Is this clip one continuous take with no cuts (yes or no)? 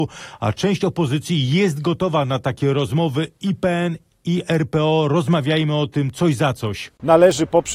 yes